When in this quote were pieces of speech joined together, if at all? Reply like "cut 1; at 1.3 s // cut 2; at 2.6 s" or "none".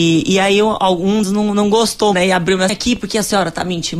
cut 1; at 1.2 s // cut 2; at 2.1 s // cut 3; at 2.7 s